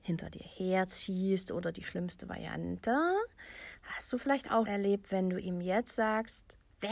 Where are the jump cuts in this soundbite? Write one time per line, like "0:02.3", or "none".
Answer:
0:04.7